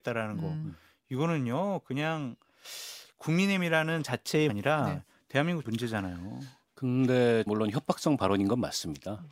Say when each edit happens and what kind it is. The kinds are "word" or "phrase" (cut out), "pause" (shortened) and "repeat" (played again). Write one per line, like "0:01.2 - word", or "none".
0:04.0 - word
0:04.5 - word
0:05.6 - phrase
0:07.5 - word